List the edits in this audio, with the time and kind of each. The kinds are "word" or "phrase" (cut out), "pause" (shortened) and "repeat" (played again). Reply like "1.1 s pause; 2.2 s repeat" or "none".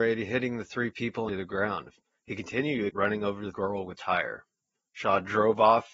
1.3 s phrase; 2.0 s pause; 2.9 s word; 3.5 s phrase; 4.0 s word